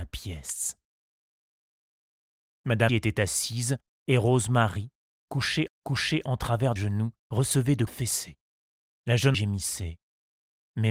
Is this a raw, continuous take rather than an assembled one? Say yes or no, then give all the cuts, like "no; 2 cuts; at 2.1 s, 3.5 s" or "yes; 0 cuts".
no; 8 cuts; at 2.9 s, 3.9 s, 5.7 s, 6.8 s, 7.2 s, 7.9 s, 8.7 s, 9.3 s